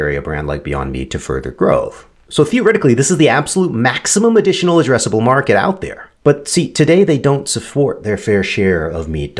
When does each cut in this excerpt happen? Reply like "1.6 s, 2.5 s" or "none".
6.2 s